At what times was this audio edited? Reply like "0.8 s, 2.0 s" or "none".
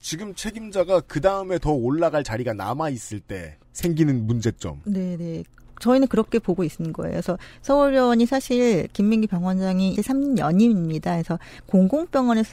3.6 s, 9.9 s